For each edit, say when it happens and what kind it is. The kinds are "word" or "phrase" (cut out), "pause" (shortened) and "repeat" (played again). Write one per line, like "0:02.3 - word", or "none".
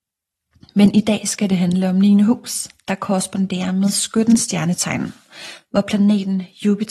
none